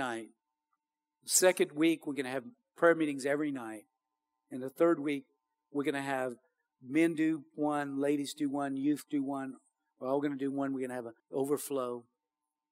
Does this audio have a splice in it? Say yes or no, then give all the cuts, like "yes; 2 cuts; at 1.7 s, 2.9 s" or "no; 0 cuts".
yes; 1 cut; at 11.2 s